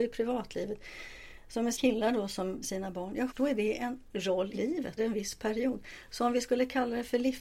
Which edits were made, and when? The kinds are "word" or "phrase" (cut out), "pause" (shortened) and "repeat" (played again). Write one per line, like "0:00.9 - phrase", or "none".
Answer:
0:01.7 - word
0:02.6 - phrase
0:03.3 - word
0:04.5 - word
0:05.0 - word